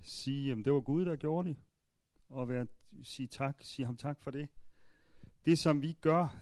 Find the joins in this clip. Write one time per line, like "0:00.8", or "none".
none